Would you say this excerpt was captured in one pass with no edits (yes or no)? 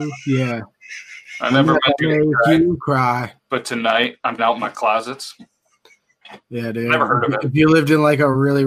no